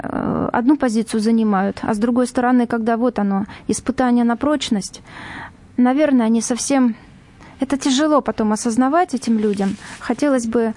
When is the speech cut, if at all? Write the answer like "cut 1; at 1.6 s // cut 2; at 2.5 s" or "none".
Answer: none